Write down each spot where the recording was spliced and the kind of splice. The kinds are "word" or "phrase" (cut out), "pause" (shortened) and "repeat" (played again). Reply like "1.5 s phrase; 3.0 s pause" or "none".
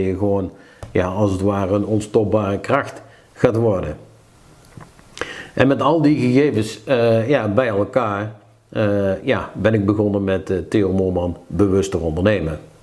none